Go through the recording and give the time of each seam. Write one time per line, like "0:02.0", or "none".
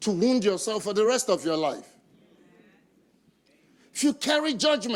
none